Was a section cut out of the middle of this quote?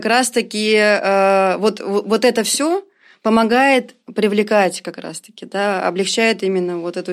no; 0 cuts

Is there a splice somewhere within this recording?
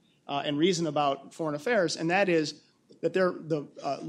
no; 0 cuts

